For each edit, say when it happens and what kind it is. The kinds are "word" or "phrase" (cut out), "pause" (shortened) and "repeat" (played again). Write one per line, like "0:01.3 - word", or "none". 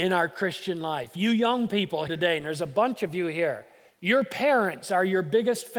0:02.1 - word
0:03.9 - pause